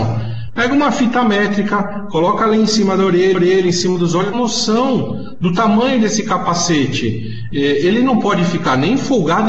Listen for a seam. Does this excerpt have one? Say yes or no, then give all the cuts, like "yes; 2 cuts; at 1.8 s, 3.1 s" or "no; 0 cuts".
yes; 2 cuts; at 3.3 s, 4.3 s